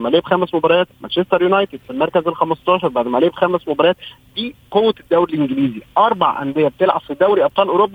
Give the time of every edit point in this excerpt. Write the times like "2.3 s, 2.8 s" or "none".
0.9 s